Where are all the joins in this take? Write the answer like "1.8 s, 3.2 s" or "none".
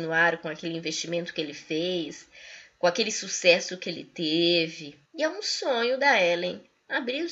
5.1 s